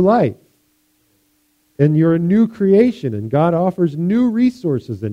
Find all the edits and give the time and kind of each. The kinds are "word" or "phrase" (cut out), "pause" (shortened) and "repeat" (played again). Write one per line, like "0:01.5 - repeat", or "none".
none